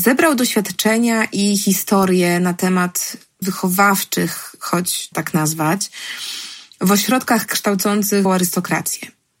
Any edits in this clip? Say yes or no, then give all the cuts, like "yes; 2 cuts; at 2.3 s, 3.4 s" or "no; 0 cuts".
yes; 3 cuts; at 3.4 s, 5.1 s, 8.2 s